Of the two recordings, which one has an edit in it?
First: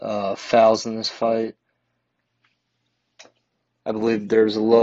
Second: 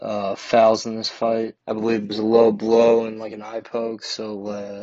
second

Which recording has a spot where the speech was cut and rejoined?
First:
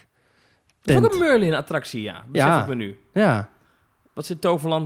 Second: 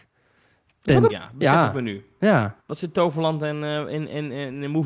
second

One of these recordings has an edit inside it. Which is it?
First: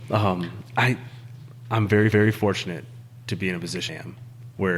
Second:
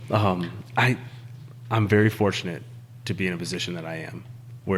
first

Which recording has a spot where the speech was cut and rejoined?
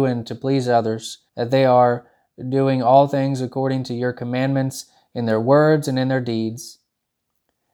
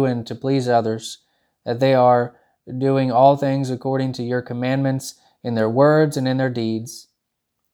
first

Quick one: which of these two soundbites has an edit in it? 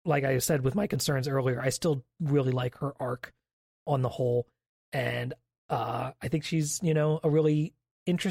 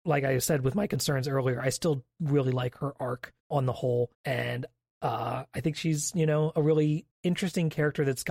second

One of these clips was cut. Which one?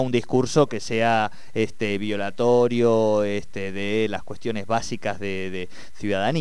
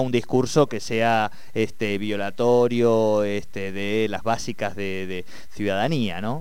second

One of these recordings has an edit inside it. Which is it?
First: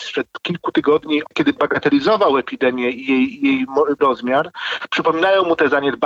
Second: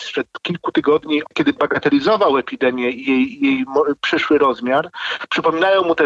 first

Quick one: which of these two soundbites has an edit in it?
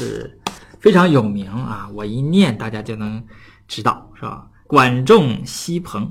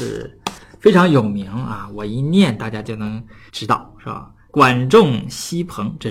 second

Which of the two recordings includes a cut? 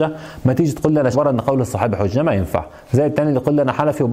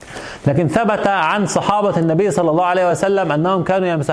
first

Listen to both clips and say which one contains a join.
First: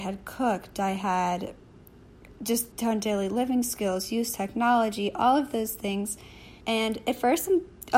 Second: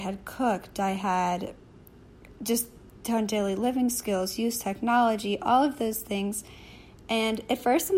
first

